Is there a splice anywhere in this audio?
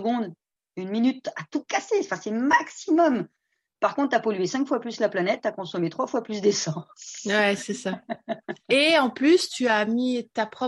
no; 0 cuts

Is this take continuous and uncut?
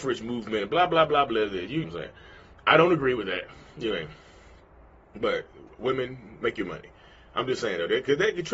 no; 1 cut; at 1.8 s

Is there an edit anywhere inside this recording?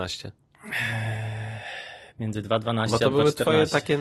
no; 0 cuts

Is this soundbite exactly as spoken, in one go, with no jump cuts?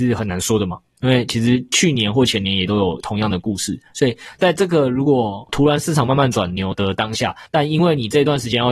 no; 1 cut; at 7.5 s

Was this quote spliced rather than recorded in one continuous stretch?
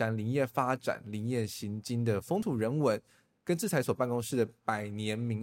no; 0 cuts

